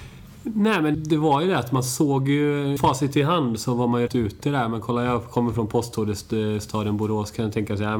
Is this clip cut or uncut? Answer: cut